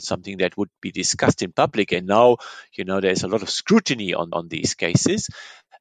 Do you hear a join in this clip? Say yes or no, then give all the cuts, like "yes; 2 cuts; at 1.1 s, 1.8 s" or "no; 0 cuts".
yes; 1 cut; at 4.3 s